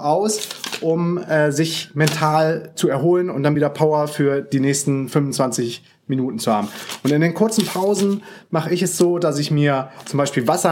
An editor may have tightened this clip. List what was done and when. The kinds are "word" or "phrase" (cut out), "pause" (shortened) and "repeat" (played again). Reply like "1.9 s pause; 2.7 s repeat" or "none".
none